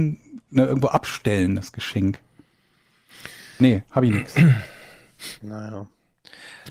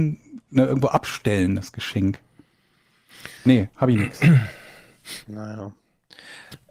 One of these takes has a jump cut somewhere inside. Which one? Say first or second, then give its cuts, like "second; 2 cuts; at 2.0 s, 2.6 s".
second; 1 cut; at 3.4 s